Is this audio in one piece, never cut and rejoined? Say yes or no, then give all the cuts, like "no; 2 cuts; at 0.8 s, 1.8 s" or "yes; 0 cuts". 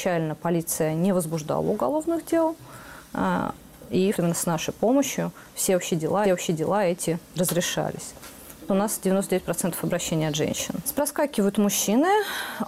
no; 2 cuts; at 4.1 s, 6.2 s